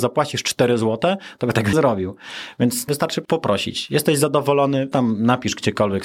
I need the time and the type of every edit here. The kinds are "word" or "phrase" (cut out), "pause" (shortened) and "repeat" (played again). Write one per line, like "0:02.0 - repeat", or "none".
0:01.7 - word
0:02.9 - word
0:03.2 - word
0:04.9 - word